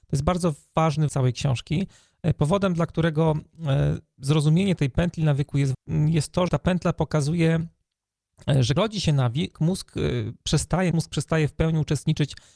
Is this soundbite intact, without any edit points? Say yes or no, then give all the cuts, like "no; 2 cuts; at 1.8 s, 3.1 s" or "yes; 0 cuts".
no; 6 cuts; at 1.1 s, 5.7 s, 6.5 s, 8.8 s, 9.5 s, 10.9 s